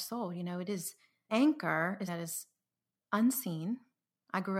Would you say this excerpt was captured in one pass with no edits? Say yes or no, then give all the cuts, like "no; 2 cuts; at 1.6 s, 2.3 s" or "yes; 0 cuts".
no; 2 cuts; at 1.3 s, 2.1 s